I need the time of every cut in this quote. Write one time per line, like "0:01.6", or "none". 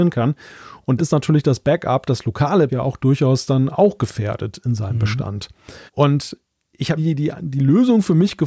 0:01.0
0:02.7
0:05.9
0:07.0